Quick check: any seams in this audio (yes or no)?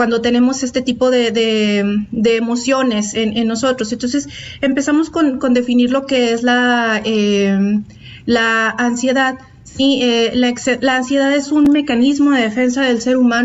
no